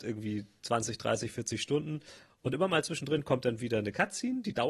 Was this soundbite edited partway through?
no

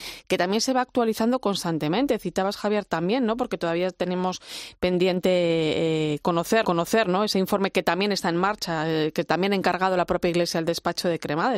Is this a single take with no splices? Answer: no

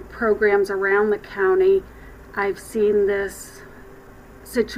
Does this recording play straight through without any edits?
yes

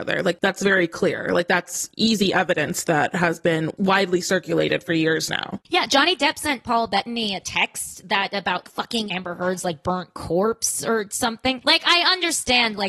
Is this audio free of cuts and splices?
no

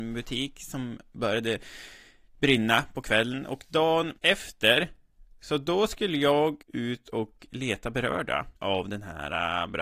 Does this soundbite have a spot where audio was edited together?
yes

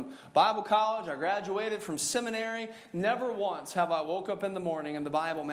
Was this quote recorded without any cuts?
yes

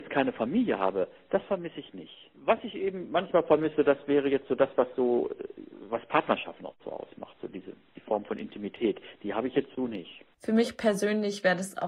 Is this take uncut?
no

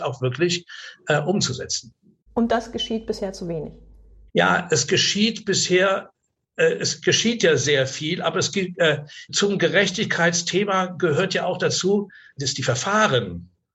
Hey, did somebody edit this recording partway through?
no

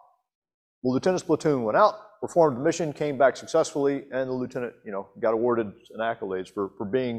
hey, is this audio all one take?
yes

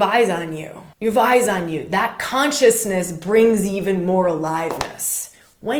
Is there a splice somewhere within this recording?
yes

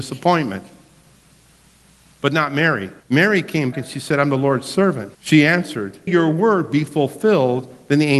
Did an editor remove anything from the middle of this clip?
yes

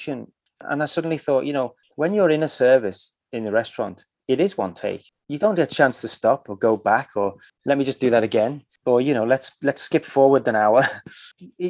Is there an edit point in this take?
no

